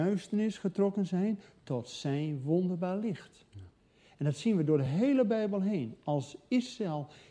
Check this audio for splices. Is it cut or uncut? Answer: uncut